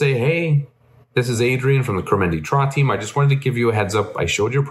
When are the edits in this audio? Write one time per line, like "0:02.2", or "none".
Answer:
none